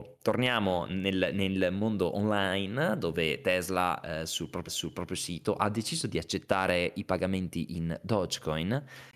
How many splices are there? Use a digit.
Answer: 1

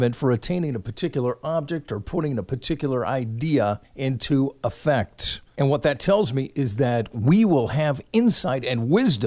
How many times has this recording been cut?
1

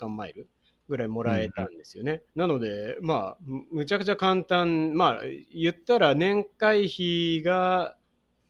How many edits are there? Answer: 1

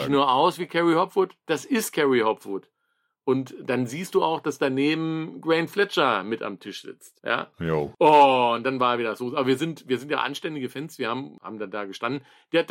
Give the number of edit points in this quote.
0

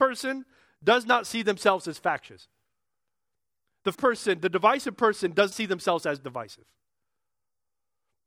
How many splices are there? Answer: 2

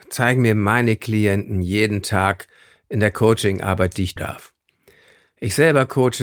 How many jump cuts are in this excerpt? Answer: 1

